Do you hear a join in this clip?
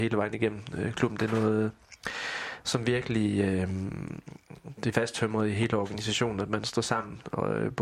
yes; 1 cut; at 4.9 s

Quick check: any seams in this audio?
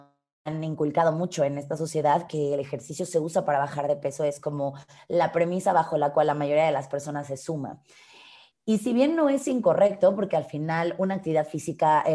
no; 0 cuts

